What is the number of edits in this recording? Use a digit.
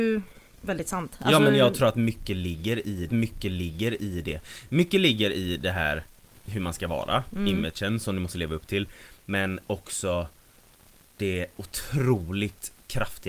2